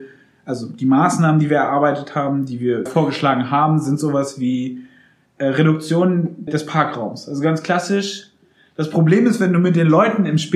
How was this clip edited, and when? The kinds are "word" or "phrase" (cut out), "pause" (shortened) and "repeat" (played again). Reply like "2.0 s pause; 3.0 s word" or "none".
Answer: 2.9 s phrase; 6.5 s word